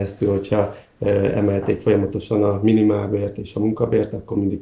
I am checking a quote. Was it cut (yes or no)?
no